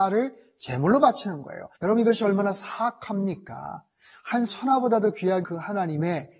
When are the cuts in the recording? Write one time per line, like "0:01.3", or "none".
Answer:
0:01.7
0:04.5
0:05.4